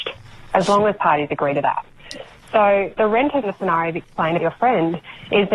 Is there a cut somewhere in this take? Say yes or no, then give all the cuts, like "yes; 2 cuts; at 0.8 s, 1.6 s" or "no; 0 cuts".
yes; 4 cuts; at 1.0 s, 3.0 s, 3.4 s, 4.4 s